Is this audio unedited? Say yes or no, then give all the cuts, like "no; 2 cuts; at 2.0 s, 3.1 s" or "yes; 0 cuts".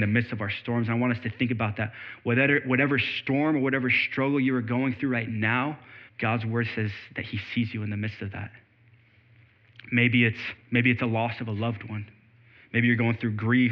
no; 2 cuts; at 6.1 s, 10.6 s